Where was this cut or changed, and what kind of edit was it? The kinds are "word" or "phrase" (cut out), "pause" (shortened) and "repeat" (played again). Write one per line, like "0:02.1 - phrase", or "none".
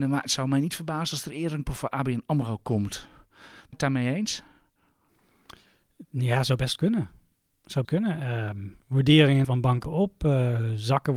0:01.7 - word
0:03.7 - word
0:07.8 - word
0:09.4 - word
0:09.8 - word